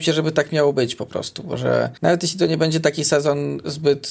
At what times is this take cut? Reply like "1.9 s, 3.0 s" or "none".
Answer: 2.0 s